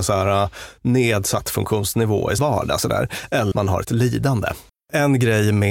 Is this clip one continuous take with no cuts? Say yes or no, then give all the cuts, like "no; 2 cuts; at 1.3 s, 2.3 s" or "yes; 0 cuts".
no; 4 cuts; at 2.4 s, 3.5 s, 3.8 s, 4.7 s